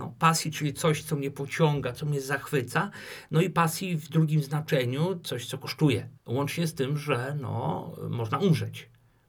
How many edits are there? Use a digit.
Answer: 1